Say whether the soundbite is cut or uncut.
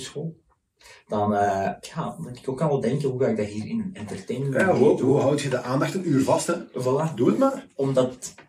uncut